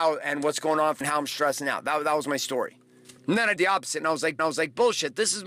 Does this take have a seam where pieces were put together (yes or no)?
yes